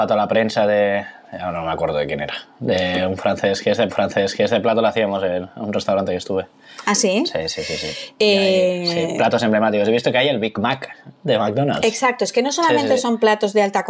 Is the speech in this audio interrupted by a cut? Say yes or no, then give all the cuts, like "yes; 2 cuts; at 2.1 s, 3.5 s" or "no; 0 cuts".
yes; 1 cut; at 3.9 s